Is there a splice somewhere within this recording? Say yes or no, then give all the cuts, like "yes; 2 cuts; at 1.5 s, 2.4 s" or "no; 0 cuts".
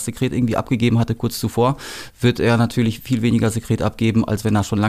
no; 0 cuts